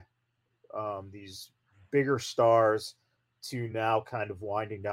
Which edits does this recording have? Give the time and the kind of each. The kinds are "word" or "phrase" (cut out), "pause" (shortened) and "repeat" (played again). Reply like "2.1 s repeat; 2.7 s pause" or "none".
none